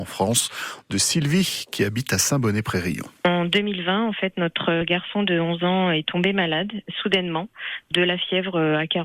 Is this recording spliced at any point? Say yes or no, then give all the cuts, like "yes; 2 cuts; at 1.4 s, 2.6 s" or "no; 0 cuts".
yes; 2 cuts; at 0.9 s, 3.2 s